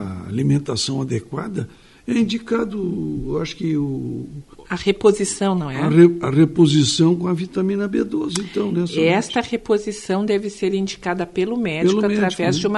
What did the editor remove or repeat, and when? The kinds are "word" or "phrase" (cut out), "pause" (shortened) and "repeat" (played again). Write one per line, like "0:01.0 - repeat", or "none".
none